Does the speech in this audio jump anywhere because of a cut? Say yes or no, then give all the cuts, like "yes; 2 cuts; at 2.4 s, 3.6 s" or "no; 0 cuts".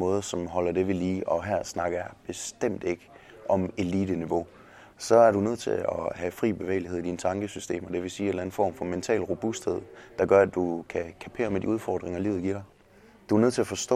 no; 0 cuts